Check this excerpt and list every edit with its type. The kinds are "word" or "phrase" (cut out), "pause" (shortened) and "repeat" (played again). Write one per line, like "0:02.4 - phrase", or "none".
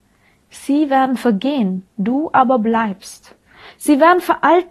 0:01.9 - pause